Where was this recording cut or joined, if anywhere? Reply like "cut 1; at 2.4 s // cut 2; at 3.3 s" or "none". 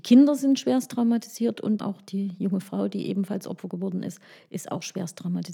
cut 1; at 1.8 s